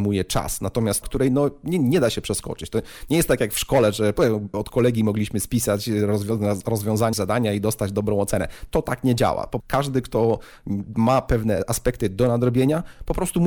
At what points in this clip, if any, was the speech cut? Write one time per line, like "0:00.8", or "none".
0:01.0
0:04.5
0:07.1
0:09.6